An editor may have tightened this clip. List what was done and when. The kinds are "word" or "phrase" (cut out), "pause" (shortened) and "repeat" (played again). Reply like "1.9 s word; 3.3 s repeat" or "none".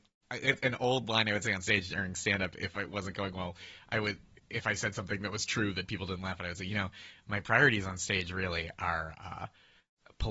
none